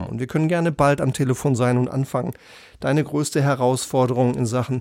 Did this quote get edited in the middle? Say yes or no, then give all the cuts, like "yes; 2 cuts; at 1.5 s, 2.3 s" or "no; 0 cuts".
no; 0 cuts